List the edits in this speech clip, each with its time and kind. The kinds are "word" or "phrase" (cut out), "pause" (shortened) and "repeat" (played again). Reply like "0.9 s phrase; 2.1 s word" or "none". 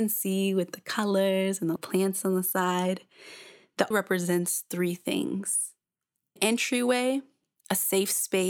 1.8 s word; 3.9 s word; 6.4 s word